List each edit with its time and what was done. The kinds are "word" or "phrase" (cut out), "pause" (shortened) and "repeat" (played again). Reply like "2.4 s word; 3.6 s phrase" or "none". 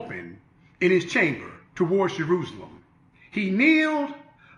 1.7 s pause; 3.0 s pause